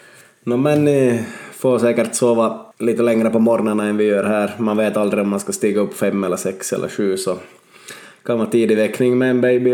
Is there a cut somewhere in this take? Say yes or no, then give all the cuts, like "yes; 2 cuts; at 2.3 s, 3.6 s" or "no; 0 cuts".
yes; 1 cut; at 2.7 s